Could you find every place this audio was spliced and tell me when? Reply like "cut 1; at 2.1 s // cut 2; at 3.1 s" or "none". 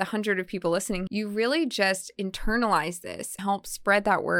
cut 1; at 1.1 s // cut 2; at 3.4 s

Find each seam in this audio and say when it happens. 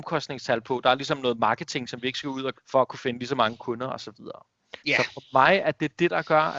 cut 1; at 2.5 s // cut 2; at 4.8 s

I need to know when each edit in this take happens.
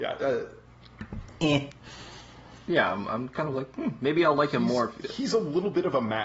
none

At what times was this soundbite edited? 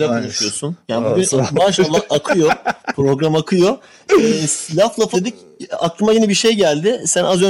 cut 1; at 5.1 s

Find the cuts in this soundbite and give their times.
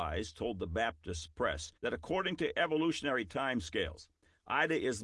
cut 1; at 1.8 s

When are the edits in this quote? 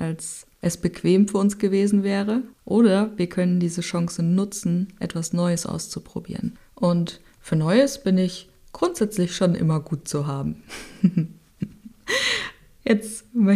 none

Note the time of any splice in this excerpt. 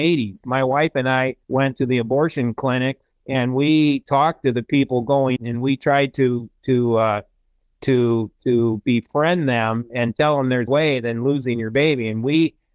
cut 1; at 1.4 s // cut 2; at 3.2 s // cut 3; at 5.4 s // cut 4; at 10.7 s

